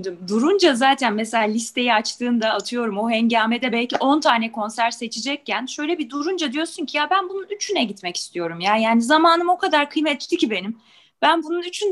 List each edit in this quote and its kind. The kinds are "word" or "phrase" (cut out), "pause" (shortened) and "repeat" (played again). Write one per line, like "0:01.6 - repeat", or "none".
none